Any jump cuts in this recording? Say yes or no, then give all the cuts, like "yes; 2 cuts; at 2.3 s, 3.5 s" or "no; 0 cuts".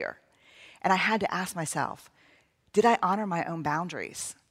no; 0 cuts